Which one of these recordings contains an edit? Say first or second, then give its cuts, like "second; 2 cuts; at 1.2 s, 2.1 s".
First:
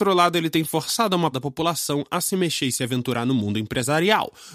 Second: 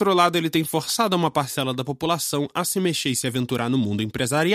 first; 1 cut; at 1.3 s